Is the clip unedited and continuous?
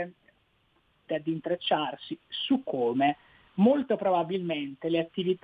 no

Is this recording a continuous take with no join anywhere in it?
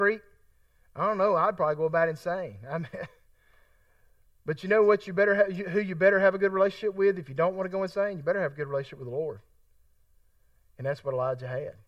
yes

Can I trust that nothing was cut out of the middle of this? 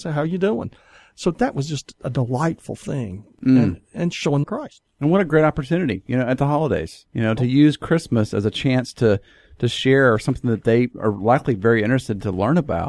no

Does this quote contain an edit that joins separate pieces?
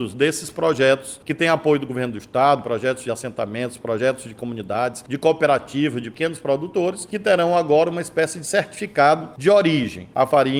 no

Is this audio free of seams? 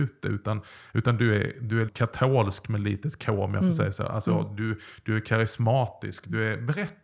no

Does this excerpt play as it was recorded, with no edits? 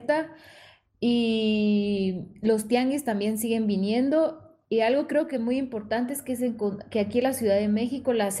yes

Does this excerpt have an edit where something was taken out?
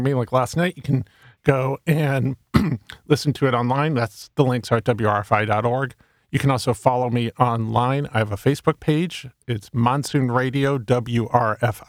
no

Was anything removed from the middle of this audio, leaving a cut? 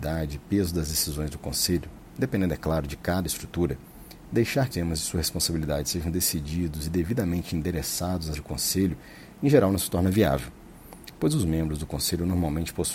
yes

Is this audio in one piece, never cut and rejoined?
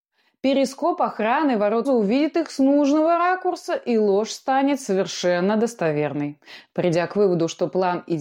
no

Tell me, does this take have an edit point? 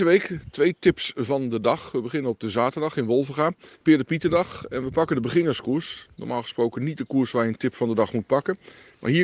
yes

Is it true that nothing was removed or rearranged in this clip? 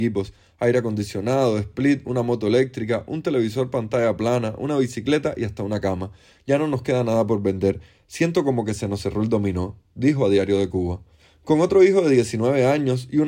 yes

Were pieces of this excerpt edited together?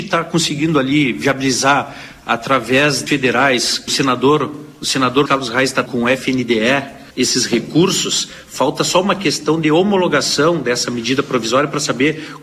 yes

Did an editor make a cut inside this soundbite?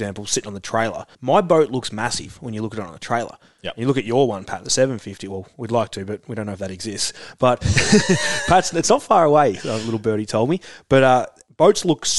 yes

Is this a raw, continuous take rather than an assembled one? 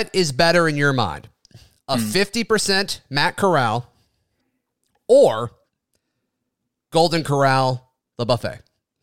yes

